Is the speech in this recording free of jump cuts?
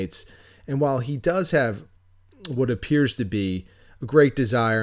yes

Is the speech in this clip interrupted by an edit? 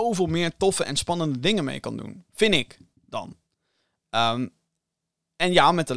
no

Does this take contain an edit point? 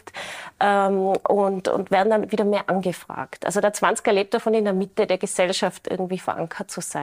no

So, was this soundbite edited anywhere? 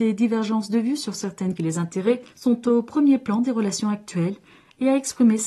yes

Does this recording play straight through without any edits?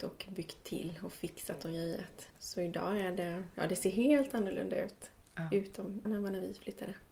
no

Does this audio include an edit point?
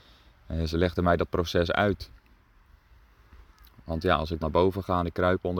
yes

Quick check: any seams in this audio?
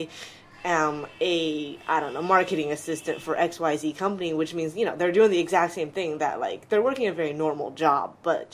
no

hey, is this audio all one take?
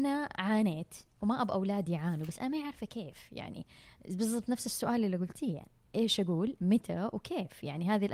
yes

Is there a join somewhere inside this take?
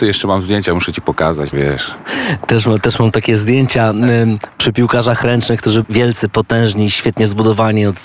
yes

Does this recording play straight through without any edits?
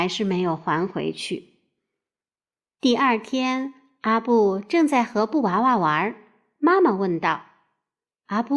yes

